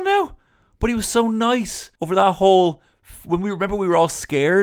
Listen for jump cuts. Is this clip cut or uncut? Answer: cut